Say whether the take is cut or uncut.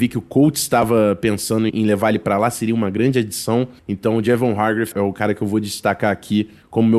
cut